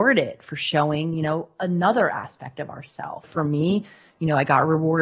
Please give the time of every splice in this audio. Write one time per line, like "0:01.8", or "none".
0:03.2